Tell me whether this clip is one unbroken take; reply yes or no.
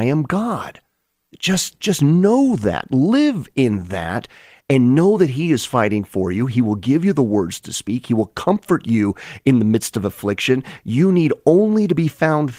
yes